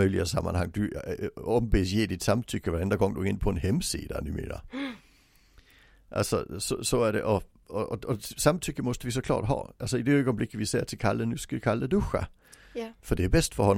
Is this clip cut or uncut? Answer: uncut